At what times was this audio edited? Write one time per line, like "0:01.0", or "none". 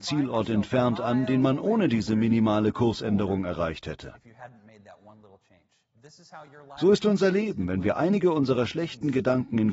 none